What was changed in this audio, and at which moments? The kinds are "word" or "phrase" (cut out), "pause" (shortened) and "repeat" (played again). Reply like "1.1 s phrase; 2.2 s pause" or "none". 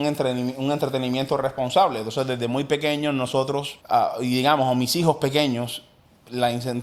3.8 s pause